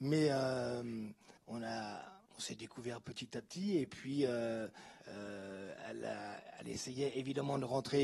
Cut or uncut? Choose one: cut